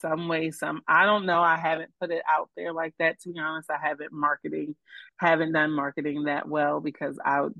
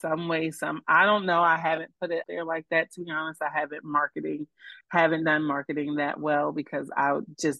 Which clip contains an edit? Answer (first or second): second